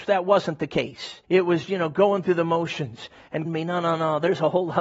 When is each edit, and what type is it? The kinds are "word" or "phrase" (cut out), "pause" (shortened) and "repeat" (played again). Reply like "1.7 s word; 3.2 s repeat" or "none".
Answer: 1.2 s pause; 1.7 s word; 3.4 s phrase